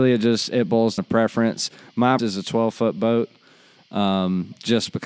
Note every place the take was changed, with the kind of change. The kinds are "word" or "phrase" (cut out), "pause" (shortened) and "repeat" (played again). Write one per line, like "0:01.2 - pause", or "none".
0:01.0 - word
0:02.2 - word

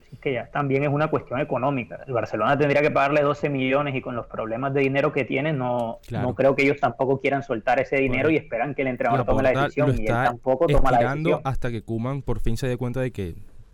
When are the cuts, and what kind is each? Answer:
none

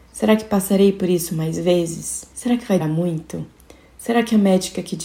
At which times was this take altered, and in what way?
0:02.3 - pause
0:02.8 - word

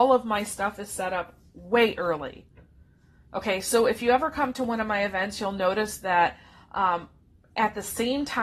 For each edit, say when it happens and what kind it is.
none

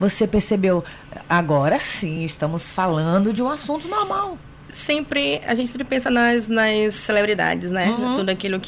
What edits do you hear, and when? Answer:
none

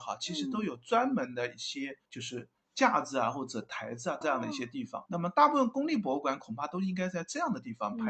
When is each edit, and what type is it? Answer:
0:02.1 - pause
0:04.2 - phrase
0:05.1 - word

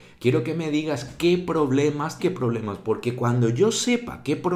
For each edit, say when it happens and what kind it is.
0:02.2 - phrase

